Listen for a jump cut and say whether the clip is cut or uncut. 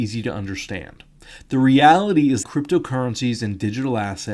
cut